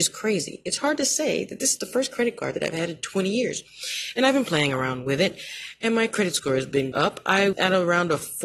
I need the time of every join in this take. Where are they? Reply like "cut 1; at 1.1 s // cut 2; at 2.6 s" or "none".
cut 1; at 6.9 s // cut 2; at 7.5 s